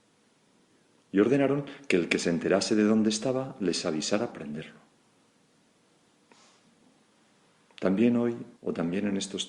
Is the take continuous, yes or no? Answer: no